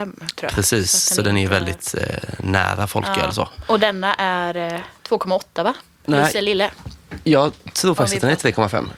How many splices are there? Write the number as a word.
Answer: zero